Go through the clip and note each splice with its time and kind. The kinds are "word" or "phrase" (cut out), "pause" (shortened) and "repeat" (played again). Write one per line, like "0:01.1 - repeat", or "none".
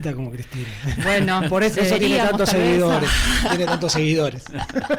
0:01.8 - word
0:03.5 - word